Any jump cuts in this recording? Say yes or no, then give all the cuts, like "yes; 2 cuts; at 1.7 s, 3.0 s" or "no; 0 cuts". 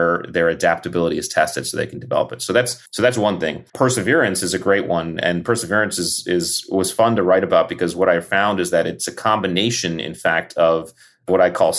yes; 2 cuts; at 2.9 s, 3.7 s